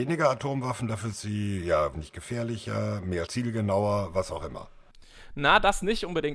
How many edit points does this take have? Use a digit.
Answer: 3